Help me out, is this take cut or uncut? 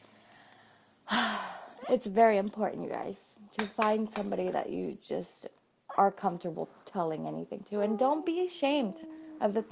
uncut